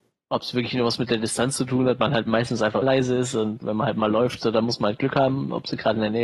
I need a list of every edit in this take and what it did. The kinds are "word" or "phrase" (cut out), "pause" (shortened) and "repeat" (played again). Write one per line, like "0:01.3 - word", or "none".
0:02.3 - word
0:02.8 - word
0:03.6 - word